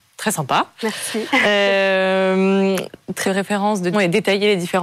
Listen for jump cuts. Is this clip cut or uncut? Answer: cut